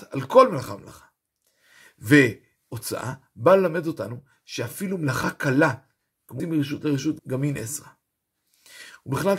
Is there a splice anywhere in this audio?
yes; 2 cuts; at 6.4 s, 7.2 s

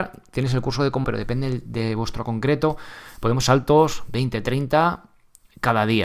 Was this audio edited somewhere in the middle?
yes; 3 cuts; at 1.0 s, 2.2 s, 3.4 s

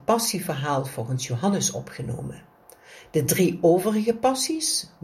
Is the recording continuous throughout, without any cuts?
yes; 0 cuts

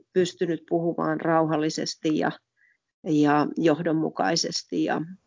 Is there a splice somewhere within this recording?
no; 0 cuts

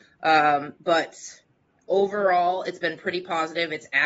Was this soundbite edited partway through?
no; 0 cuts

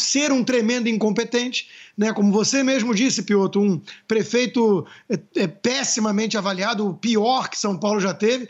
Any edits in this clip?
no; 0 cuts

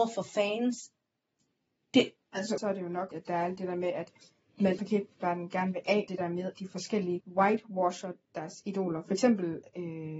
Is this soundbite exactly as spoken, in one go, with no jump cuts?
no; 6 cuts; at 2.6 s, 3.1 s, 4.8 s, 6.1 s, 6.5 s, 7.2 s

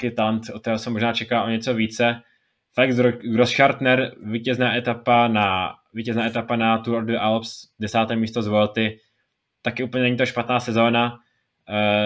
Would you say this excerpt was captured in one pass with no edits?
yes; 0 cuts

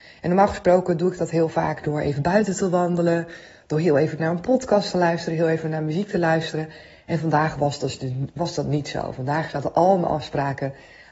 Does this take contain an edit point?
no; 0 cuts

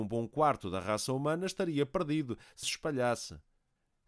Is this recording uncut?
no; 1 cut; at 2.6 s

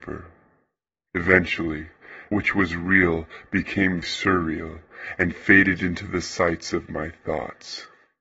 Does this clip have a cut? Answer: yes; 2 cuts; at 2.3 s, 4.0 s

